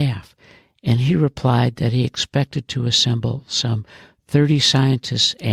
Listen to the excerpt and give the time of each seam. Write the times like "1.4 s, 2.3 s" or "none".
none